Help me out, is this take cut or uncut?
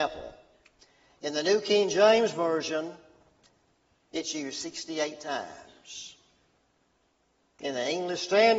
uncut